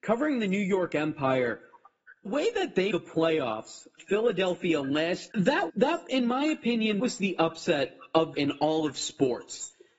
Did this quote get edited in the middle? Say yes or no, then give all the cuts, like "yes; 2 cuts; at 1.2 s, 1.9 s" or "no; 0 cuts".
yes; 7 cuts; at 2.3 s, 2.9 s, 4.0 s, 5.3 s, 5.7 s, 7.0 s, 8.3 s